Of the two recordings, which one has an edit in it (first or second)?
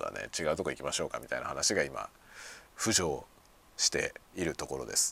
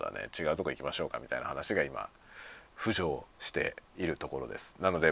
second